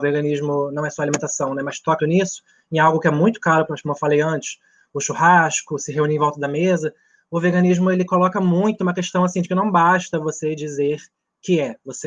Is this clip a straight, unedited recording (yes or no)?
no